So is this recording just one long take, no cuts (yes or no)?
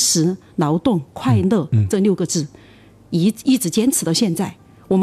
yes